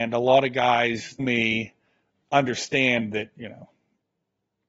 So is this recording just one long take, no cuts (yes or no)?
no